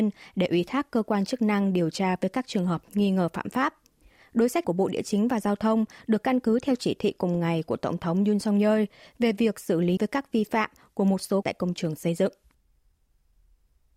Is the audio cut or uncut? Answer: cut